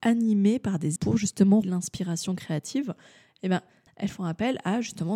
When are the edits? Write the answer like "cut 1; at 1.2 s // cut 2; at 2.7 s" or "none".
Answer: cut 1; at 1.0 s // cut 2; at 1.6 s // cut 3; at 3.9 s